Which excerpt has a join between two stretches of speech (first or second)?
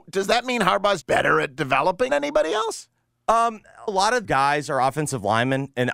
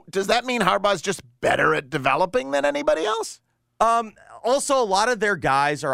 first